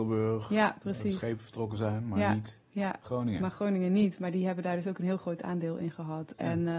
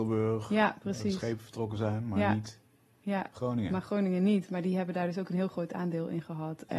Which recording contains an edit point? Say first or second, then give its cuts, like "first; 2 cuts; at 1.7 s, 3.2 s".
first; 1 cut; at 2.6 s